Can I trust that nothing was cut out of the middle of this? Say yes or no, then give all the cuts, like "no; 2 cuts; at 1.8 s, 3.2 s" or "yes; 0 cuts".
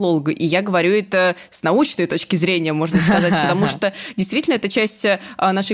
yes; 0 cuts